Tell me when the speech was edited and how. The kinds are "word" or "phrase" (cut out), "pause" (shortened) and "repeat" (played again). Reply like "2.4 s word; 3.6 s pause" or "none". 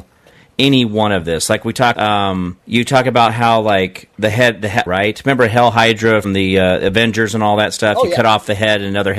1.9 s word; 2.6 s pause; 4.1 s pause; 4.9 s phrase; 6.2 s word